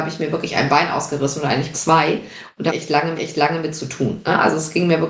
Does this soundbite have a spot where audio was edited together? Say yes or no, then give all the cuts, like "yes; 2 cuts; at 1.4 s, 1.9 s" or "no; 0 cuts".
yes; 3 cuts; at 1.7 s, 2.7 s, 3.1 s